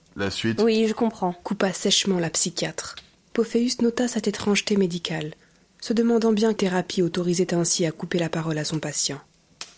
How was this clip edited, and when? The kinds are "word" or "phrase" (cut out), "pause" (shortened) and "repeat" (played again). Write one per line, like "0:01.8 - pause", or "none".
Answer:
0:03.1 - pause
0:06.6 - word